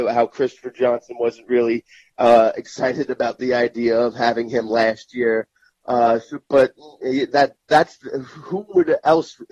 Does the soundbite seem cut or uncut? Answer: uncut